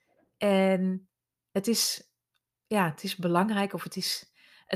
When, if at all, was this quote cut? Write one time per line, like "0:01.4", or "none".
none

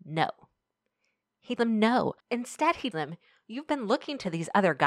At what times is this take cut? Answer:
0:01.6
0:02.2
0:02.9

